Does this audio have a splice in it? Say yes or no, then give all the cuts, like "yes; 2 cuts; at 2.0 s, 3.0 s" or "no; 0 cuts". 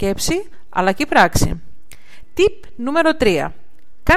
no; 0 cuts